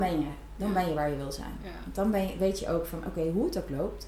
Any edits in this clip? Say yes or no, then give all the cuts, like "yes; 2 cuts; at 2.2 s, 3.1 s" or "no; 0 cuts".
no; 0 cuts